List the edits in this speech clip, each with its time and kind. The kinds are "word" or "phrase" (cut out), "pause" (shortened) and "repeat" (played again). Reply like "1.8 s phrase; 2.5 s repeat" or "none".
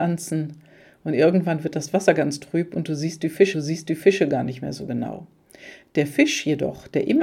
3.5 s repeat